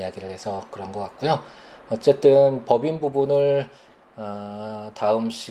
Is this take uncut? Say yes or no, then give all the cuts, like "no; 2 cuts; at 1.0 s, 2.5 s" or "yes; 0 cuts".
yes; 0 cuts